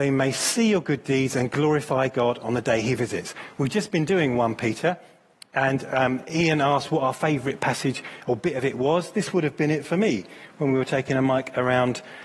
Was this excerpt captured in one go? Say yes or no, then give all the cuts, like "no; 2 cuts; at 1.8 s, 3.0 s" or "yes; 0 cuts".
yes; 0 cuts